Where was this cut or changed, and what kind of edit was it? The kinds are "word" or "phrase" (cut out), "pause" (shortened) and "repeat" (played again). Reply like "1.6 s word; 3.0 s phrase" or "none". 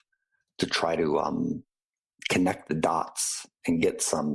none